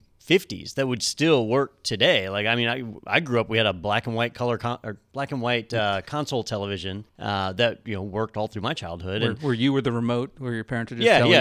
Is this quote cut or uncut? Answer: cut